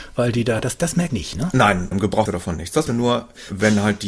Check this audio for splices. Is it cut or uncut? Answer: cut